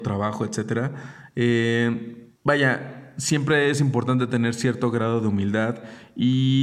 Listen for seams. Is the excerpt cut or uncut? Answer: cut